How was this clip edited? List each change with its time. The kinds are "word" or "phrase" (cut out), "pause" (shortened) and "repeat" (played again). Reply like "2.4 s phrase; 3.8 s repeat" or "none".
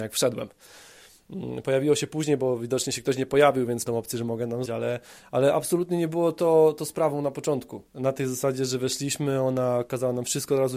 3.9 s word; 4.7 s word; 7.9 s pause